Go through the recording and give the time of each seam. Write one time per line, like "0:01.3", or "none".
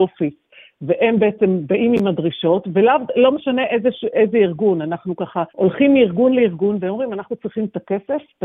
0:05.5